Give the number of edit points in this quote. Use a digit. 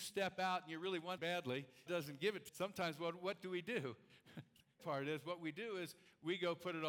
4